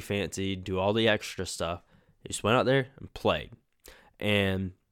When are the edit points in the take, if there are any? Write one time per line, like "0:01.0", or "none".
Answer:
none